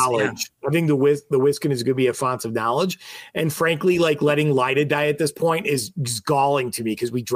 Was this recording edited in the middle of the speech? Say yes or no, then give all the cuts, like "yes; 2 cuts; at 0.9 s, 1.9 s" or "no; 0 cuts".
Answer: no; 0 cuts